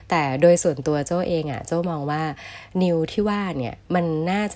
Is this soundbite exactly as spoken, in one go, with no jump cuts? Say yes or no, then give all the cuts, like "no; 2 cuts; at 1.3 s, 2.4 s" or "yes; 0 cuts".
yes; 0 cuts